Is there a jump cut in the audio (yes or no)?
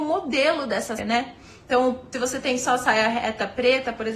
yes